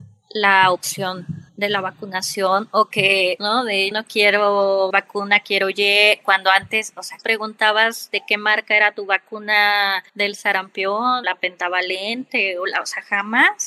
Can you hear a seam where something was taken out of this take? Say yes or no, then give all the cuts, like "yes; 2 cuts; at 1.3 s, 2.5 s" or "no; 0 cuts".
yes; 7 cuts; at 1.5 s, 3.4 s, 3.9 s, 4.9 s, 7.2 s, 10.1 s, 11.2 s